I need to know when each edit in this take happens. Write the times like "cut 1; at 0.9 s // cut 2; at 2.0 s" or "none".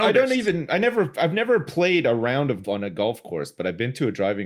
cut 1; at 2.6 s